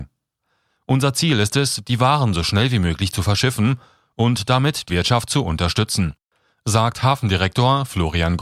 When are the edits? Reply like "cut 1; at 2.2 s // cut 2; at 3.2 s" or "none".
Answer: cut 1; at 4.9 s